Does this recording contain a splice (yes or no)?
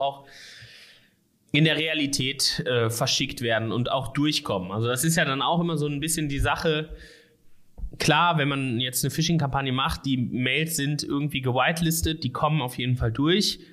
no